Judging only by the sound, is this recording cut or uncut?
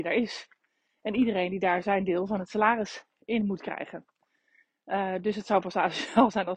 uncut